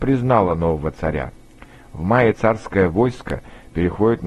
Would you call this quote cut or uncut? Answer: uncut